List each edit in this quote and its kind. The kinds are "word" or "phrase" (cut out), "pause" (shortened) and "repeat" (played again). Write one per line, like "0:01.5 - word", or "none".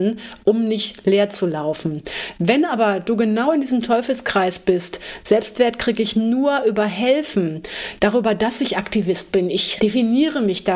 none